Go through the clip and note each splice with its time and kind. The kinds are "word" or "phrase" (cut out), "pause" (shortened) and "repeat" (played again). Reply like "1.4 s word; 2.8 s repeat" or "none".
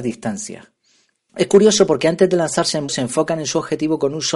2.9 s word